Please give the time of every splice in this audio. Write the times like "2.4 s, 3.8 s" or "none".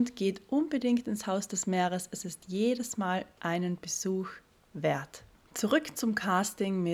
none